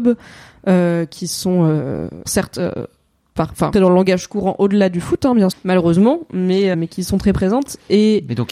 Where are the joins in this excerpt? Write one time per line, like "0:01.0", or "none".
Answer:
0:02.2
0:03.7
0:05.5
0:06.7